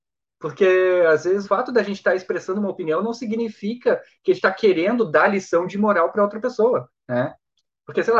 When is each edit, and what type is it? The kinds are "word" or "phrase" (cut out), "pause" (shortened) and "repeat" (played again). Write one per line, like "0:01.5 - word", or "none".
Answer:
0:01.4 - word
0:04.4 - word
0:07.0 - pause